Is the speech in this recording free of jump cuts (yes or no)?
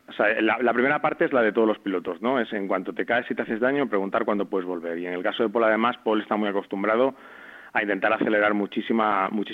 yes